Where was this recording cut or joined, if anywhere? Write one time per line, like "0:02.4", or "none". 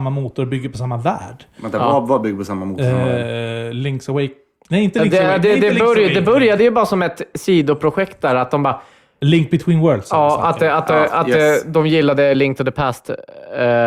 none